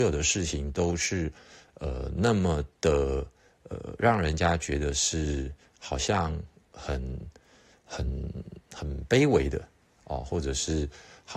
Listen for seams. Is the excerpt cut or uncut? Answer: uncut